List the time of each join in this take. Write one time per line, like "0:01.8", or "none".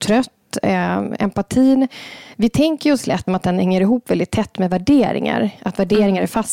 0:03.3